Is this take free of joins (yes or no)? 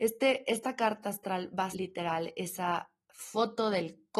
no